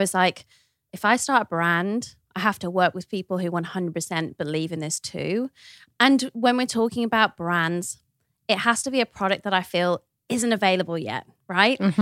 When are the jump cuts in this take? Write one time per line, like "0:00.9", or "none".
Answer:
none